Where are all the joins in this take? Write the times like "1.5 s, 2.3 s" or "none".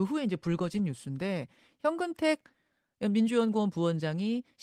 none